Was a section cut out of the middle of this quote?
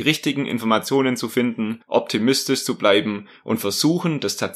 yes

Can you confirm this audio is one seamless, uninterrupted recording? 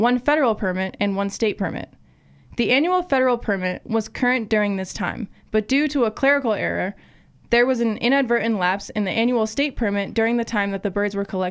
yes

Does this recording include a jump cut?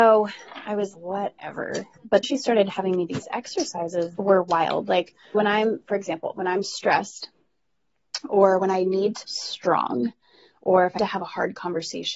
yes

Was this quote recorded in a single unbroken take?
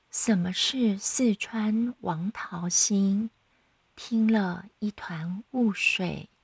no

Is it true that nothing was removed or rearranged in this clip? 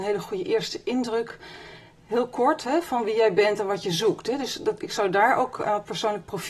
yes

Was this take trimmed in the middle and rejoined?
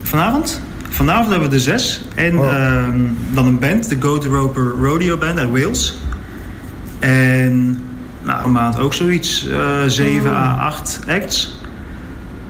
yes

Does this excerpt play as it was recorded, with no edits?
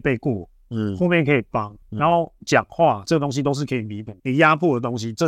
no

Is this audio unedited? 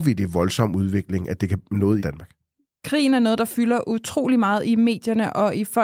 no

